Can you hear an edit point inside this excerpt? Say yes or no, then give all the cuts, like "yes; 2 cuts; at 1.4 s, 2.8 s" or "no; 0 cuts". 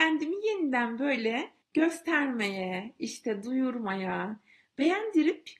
yes; 1 cut; at 1.6 s